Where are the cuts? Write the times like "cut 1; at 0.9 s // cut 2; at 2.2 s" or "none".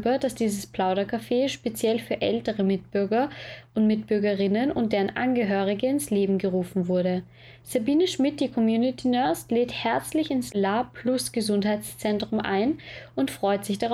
none